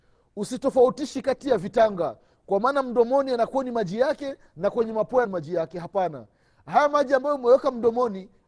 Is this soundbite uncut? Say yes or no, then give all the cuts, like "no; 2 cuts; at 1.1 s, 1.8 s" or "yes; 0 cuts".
no; 1 cut; at 5.2 s